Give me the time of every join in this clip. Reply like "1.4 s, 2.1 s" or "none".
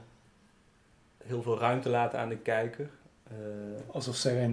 none